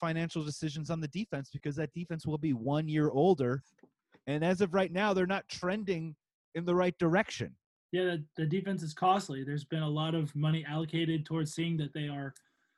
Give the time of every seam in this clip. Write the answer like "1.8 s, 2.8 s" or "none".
none